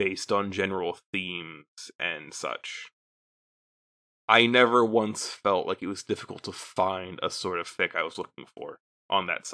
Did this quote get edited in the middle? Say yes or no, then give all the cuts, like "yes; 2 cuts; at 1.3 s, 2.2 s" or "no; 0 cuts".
no; 0 cuts